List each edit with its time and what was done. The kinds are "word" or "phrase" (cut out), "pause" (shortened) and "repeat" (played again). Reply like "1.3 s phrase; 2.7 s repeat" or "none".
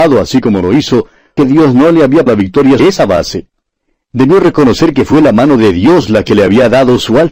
1.4 s word; 2.3 s word; 2.8 s word

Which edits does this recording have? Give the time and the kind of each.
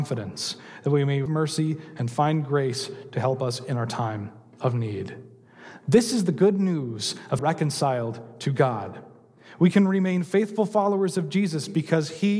1.3 s word; 7.4 s phrase

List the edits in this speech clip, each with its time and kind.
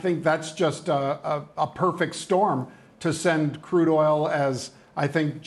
none

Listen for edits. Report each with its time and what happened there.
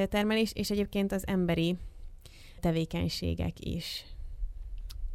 2.6 s word

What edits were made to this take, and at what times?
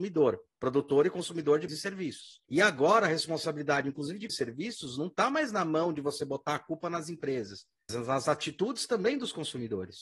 1.7 s word; 2.4 s pause; 4.3 s phrase; 7.9 s word

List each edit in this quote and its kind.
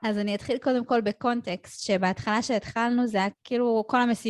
3.3 s word

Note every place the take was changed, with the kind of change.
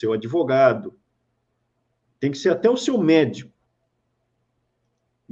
none

